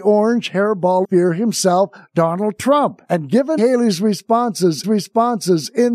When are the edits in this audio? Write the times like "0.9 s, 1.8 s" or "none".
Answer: 1.0 s, 3.0 s, 3.6 s, 4.8 s